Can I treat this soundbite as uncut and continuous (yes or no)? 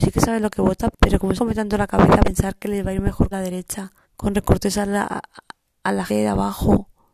no